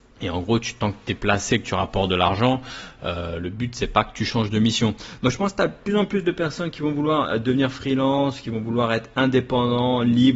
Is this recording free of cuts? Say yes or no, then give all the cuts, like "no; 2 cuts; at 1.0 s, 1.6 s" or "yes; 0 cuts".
yes; 0 cuts